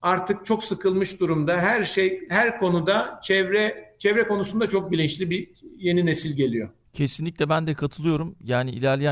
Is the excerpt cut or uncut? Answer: uncut